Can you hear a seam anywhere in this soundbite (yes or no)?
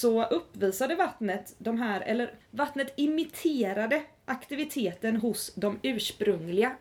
no